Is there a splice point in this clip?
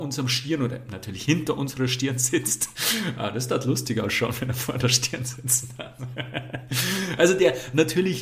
no; 0 cuts

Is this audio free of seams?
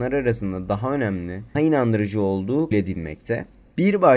no; 2 cuts; at 1.5 s, 2.7 s

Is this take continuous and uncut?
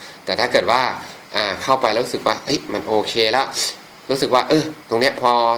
yes; 0 cuts

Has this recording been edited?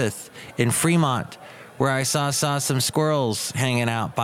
yes; 1 cut; at 2.3 s

